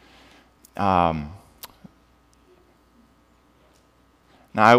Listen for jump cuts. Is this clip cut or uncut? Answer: uncut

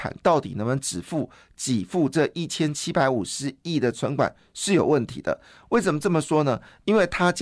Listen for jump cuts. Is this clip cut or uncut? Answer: uncut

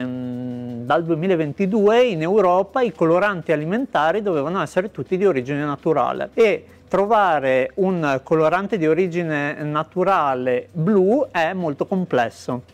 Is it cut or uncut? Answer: uncut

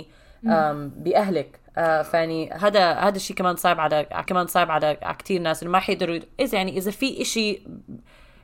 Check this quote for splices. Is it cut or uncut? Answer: cut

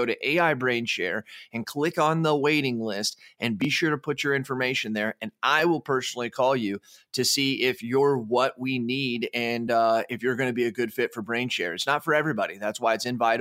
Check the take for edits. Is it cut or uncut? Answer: uncut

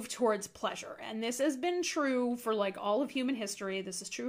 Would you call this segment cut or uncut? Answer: uncut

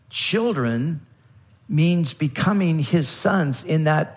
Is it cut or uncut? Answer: uncut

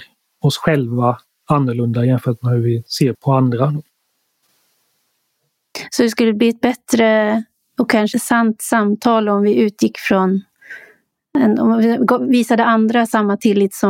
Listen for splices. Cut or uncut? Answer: cut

